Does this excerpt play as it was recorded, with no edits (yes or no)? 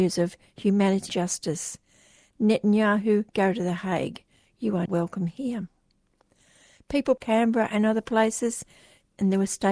no